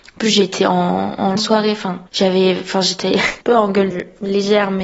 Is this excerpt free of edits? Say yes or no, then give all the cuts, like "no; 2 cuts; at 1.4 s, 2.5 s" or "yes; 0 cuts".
no; 4 cuts; at 1.4 s, 2.1 s, 3.4 s, 3.9 s